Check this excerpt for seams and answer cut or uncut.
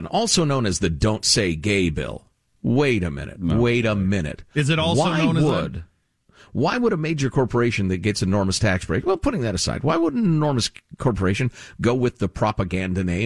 uncut